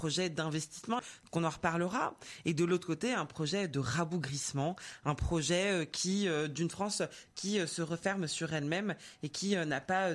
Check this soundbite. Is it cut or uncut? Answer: cut